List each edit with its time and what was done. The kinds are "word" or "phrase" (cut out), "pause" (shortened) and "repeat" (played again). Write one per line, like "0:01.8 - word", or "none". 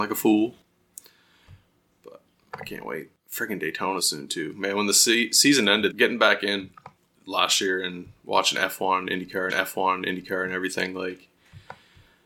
0:03.2 - pause
0:04.0 - word
0:05.9 - word
0:07.0 - pause
0:09.5 - repeat